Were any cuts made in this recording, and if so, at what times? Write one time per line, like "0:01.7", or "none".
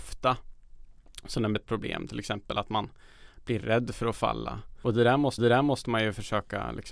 0:01.6
0:05.4